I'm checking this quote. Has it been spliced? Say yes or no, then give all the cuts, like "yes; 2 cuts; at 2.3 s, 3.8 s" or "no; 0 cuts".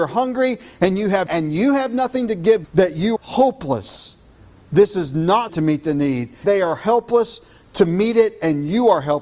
yes; 5 cuts; at 1.3 s, 2.6 s, 3.2 s, 5.5 s, 6.4 s